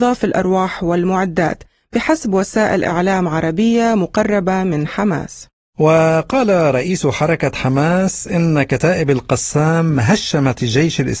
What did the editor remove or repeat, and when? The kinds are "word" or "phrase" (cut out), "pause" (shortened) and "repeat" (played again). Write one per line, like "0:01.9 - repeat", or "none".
none